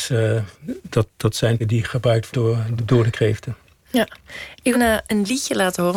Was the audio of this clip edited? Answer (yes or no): yes